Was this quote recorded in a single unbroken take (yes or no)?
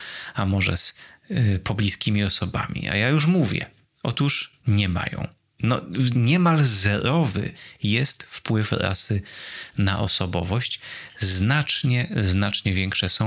no